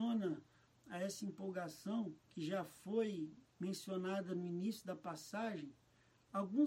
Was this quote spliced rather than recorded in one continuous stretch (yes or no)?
yes